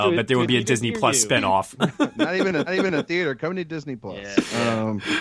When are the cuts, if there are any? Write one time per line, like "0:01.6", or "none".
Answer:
0:02.7